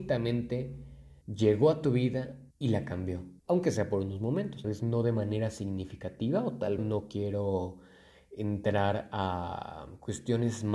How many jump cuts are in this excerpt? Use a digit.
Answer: 5